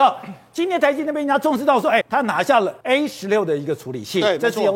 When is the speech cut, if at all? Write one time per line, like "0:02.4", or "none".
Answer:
0:02.0
0:02.8